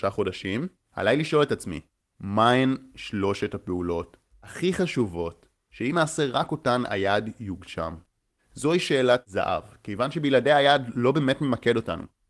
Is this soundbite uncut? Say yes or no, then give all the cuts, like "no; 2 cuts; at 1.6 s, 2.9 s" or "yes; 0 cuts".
yes; 0 cuts